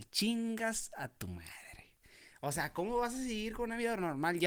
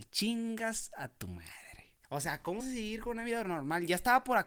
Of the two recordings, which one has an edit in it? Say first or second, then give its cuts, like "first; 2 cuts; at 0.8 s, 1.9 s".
second; 2 cuts; at 2.0 s, 2.6 s